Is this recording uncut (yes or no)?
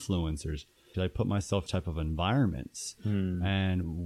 no